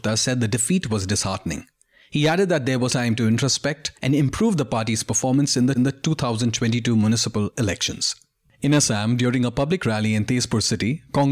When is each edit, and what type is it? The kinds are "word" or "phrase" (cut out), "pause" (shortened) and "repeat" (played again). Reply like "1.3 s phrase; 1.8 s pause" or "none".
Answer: 2.9 s word; 4.0 s pause; 5.8 s repeat